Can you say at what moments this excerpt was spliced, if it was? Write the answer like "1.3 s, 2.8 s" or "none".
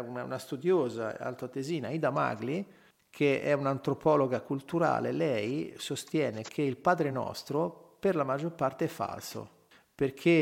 none